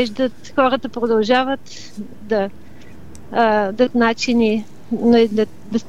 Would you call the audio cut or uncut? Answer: cut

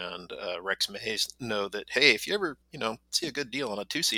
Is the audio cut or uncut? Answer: cut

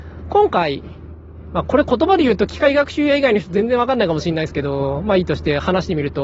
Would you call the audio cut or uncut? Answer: uncut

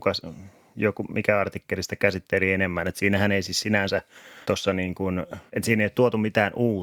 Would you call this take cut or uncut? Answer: cut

